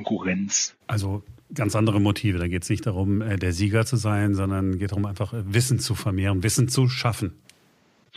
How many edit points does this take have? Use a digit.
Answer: 0